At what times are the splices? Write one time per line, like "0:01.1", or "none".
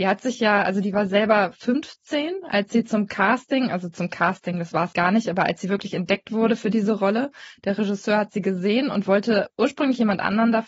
0:04.9